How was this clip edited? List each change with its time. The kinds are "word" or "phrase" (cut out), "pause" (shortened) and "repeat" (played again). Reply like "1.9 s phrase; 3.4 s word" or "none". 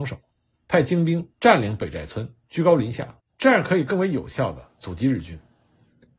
1.3 s pause

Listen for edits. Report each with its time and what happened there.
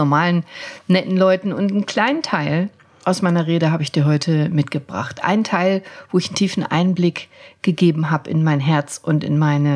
none

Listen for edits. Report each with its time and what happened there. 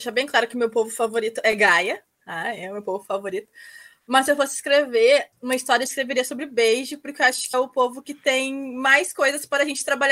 5.3 s word; 7.5 s word

